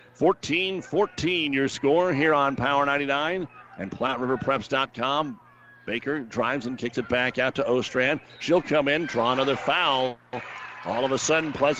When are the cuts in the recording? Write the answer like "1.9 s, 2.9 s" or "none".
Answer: none